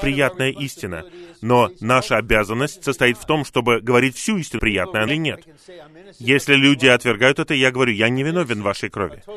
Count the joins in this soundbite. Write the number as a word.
two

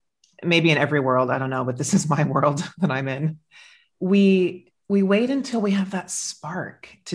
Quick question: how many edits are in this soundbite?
zero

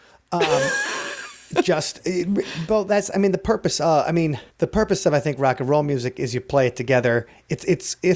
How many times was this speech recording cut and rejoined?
one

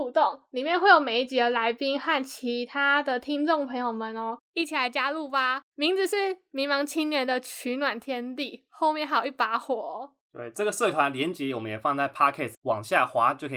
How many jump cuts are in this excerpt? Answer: one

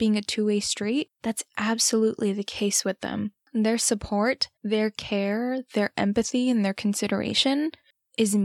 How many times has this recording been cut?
three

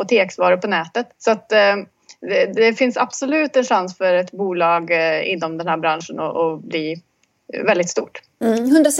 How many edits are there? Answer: one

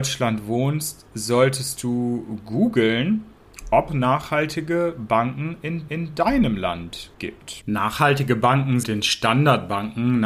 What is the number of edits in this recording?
four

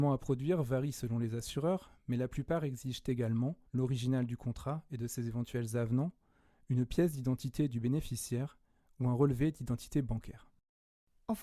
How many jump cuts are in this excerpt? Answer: one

